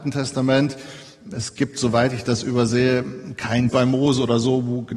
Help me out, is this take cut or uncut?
cut